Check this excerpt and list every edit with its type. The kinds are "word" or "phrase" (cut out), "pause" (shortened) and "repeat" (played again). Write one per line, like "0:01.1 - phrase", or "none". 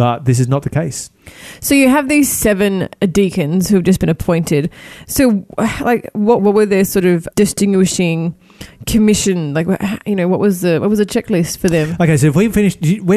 0:06.4 - phrase
0:07.3 - word